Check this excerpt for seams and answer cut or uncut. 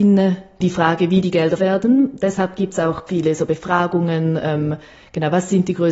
cut